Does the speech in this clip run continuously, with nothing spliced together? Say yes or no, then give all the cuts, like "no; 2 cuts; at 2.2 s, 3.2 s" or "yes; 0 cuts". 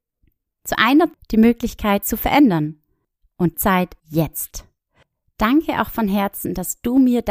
no; 4 cuts; at 1.1 s, 2.0 s, 3.5 s, 4.0 s